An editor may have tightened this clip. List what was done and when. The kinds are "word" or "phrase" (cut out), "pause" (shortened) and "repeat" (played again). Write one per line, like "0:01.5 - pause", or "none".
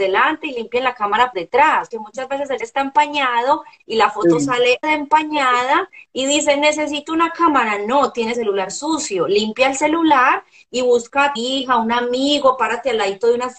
0:01.3 - word
0:01.9 - word
0:02.6 - word
0:04.8 - word
0:08.3 - word
0:11.4 - word